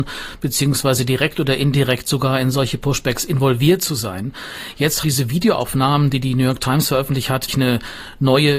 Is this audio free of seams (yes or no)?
no